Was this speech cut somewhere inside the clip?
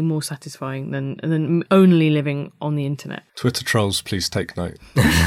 yes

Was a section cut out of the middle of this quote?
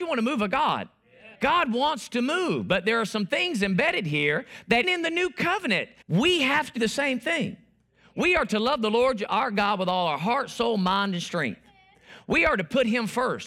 yes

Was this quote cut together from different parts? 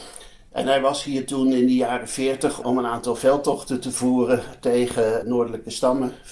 no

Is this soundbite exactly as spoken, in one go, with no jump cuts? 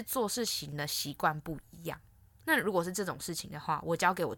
yes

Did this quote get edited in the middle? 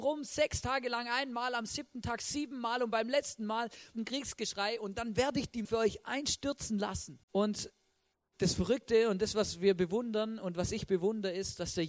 yes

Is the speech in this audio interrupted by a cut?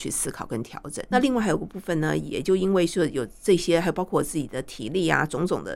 yes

